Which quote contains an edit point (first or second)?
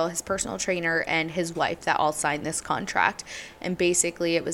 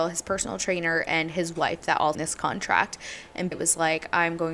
second